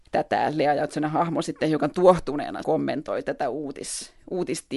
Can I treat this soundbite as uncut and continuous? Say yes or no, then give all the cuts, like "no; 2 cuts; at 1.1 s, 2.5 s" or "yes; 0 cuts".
no; 1 cut; at 2.6 s